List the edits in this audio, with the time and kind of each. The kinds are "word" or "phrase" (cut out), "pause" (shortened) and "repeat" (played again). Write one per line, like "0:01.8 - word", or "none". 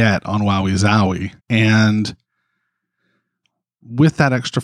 0:01.4 - pause